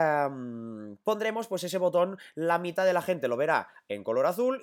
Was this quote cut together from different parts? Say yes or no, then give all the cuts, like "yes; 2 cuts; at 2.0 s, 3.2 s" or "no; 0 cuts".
no; 0 cuts